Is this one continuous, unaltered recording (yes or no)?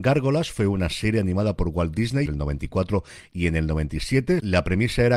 no